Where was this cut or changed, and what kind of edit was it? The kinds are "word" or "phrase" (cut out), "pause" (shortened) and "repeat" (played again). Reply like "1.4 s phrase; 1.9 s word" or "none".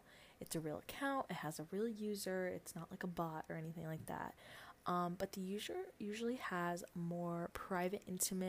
5.9 s pause